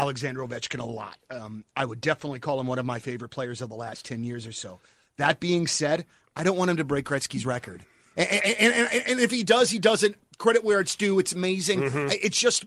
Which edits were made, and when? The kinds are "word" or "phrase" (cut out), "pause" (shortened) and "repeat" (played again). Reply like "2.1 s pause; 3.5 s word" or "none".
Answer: none